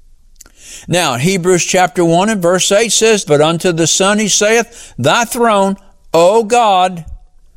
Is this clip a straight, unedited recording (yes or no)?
no